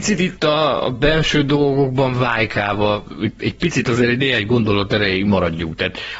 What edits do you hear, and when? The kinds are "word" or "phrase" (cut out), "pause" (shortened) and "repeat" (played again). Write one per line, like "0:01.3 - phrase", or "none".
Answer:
0:03.4 - word

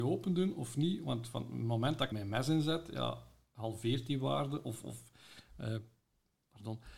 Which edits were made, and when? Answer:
0:02.1 - word

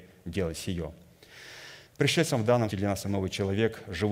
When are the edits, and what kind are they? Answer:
0:01.9 - pause
0:02.7 - word
0:03.0 - word

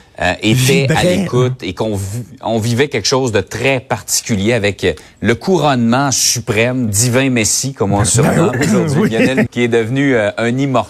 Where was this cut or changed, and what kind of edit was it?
0:06.9 - word
0:08.5 - word
0:09.5 - word

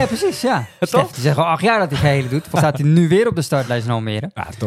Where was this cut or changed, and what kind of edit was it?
0:01.1 - phrase
0:02.6 - word

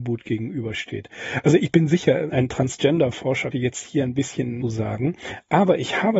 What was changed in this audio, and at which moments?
0:01.6 - word
0:02.3 - word
0:03.5 - word
0:04.6 - phrase

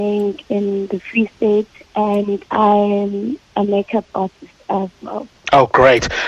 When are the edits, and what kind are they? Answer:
0:02.5 - pause

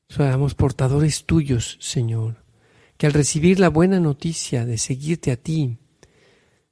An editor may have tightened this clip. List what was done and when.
none

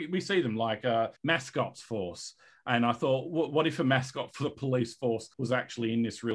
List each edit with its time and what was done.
0:01.2 - pause
0:01.9 - phrase
0:05.3 - pause

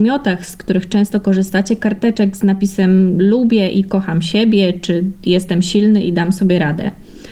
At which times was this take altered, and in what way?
none

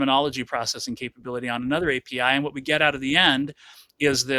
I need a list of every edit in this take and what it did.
none

